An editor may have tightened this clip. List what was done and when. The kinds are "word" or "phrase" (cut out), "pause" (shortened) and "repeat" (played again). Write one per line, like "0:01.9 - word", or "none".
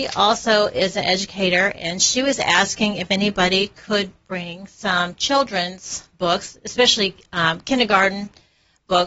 none